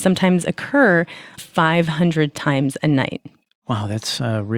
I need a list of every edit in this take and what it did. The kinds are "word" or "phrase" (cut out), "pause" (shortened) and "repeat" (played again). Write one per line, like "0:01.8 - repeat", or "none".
0:01.4 - phrase

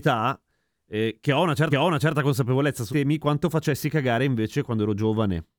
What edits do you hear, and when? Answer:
0:01.7 - repeat
0:02.9 - word

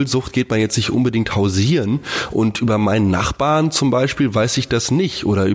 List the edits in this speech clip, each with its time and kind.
none

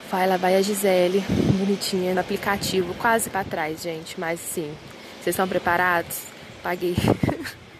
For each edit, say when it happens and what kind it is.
0:02.1 - word
0:03.3 - word

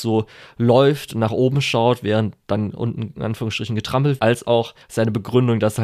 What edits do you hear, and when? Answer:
0:04.2 - word
0:04.8 - pause

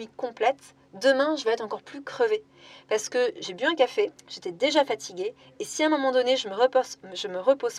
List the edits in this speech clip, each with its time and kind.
0:04.2 - pause

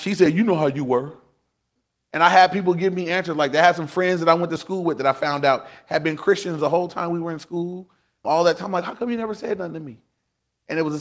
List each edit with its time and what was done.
none

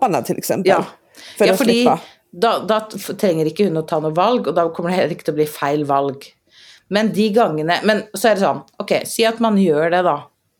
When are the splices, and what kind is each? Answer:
none

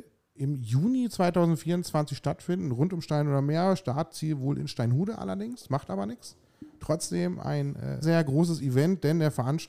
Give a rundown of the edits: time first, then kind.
0:08.0 - word

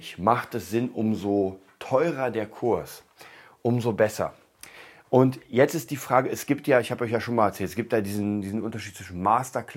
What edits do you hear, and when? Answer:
none

